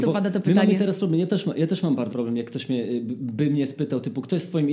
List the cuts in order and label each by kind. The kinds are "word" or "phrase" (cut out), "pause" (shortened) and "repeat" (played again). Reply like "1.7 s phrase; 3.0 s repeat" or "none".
2.1 s word